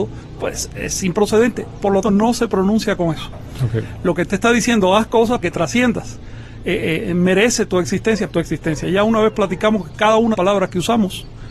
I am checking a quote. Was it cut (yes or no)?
yes